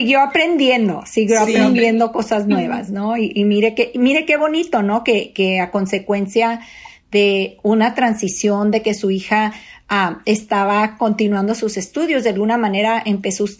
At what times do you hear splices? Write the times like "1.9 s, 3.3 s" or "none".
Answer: none